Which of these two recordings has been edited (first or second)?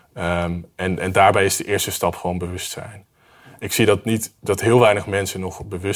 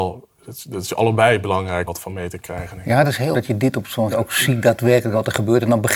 second